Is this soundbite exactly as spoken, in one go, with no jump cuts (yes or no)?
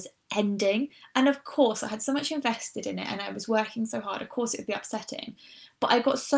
yes